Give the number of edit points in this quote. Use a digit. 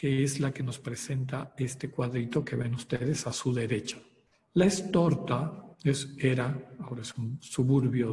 2